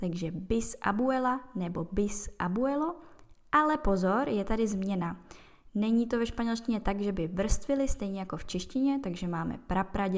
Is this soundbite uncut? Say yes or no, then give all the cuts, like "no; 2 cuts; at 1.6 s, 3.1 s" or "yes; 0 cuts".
yes; 0 cuts